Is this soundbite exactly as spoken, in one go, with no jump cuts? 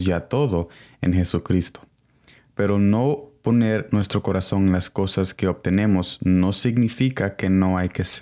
yes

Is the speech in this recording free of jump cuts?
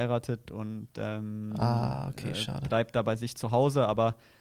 yes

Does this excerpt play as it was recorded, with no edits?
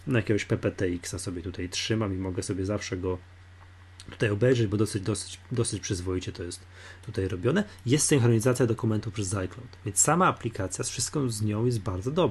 yes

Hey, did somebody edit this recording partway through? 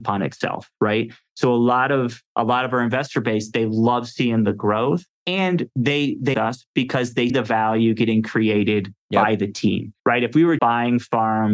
yes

